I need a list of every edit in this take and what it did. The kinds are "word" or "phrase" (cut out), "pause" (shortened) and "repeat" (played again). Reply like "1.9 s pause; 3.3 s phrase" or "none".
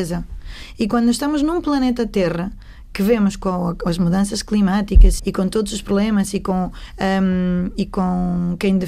5.2 s word